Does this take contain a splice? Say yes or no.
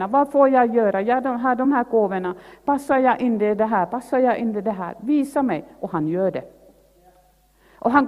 no